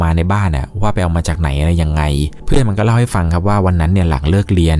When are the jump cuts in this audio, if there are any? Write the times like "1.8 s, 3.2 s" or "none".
none